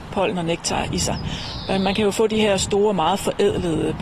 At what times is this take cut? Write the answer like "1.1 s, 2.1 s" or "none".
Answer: none